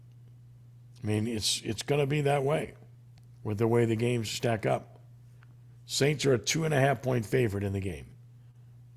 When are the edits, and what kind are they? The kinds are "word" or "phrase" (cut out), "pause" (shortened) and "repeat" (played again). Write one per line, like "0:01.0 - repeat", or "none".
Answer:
0:03.2 - pause